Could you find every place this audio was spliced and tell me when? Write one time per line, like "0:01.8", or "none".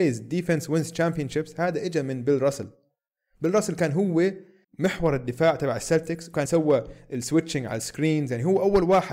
0:04.6
0:06.5